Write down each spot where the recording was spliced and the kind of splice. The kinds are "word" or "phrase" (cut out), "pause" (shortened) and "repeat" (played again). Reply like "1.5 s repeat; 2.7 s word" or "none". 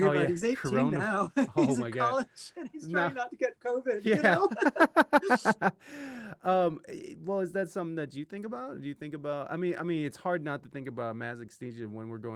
none